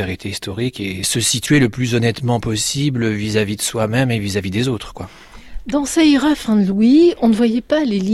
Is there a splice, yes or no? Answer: no